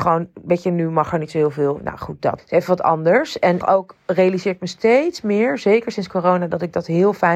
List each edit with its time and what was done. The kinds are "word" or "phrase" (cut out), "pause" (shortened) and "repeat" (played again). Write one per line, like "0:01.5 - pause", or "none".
0:02.4 - word
0:03.6 - phrase

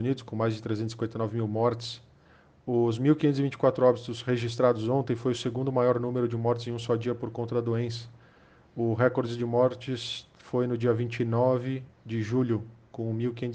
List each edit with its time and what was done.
none

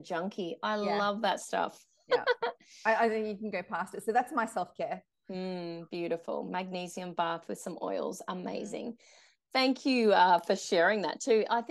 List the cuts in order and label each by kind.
none

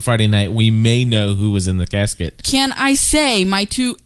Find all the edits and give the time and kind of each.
none

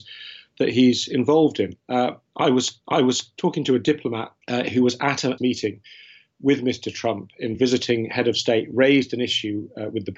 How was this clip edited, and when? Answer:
0:01.8 - pause
0:02.8 - repeat
0:04.4 - pause
0:05.4 - phrase
0:07.5 - phrase

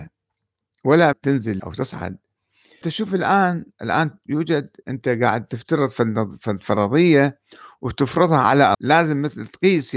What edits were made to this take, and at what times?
0:01.1 - word
0:01.6 - word
0:02.8 - word
0:04.8 - word
0:08.7 - word

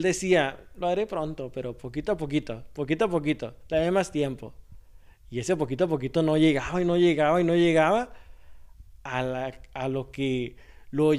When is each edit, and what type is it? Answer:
none

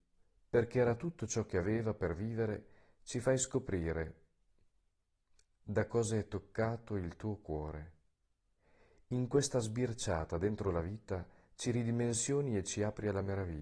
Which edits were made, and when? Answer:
none

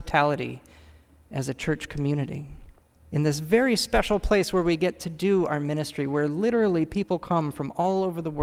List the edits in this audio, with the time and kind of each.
0:02.8 - pause

